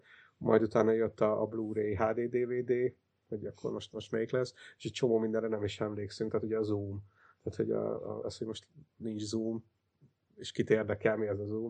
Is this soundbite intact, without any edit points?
yes; 0 cuts

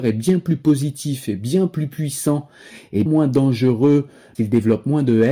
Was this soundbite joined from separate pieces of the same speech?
yes; 2 cuts; at 3.1 s, 4.3 s

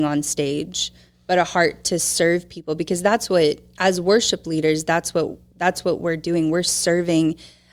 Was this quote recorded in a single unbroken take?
yes; 0 cuts

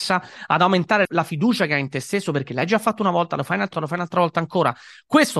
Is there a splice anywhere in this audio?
yes; 2 cuts; at 1.0 s, 3.7 s

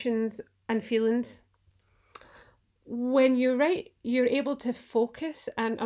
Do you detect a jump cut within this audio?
no; 0 cuts

